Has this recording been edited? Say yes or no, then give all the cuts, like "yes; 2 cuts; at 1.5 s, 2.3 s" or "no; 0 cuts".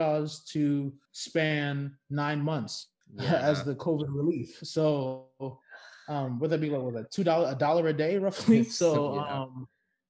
no; 0 cuts